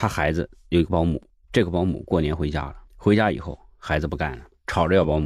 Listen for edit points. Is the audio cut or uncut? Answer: uncut